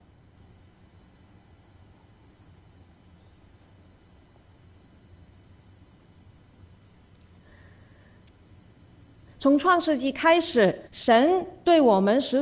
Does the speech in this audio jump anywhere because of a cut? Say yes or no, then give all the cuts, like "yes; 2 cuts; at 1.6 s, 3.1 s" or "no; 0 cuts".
yes; 1 cut; at 10.9 s